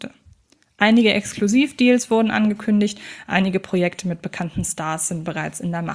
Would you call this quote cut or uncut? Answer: uncut